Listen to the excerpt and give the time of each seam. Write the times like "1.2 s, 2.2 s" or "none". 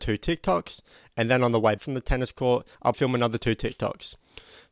1.8 s, 2.9 s